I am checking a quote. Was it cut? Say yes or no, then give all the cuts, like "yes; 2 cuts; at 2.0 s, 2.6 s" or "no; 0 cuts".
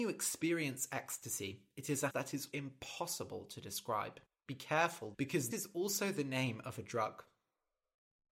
yes; 5 cuts; at 2.1 s, 2.5 s, 4.2 s, 5.1 s, 5.5 s